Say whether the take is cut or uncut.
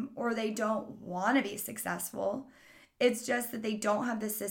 uncut